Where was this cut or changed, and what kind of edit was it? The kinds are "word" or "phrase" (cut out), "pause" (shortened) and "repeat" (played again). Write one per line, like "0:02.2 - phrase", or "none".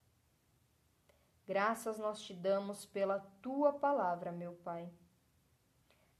none